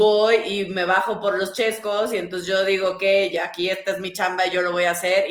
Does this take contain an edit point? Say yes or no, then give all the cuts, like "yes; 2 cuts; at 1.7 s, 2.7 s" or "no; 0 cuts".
no; 0 cuts